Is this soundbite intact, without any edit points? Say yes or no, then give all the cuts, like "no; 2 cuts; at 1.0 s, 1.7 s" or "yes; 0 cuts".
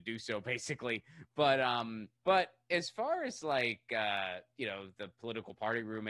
no; 1 cut; at 2.2 s